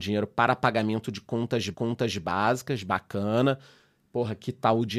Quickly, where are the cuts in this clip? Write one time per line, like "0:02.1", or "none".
0:01.7